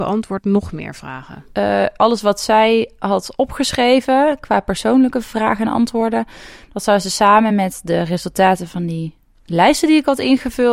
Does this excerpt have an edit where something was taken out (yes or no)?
no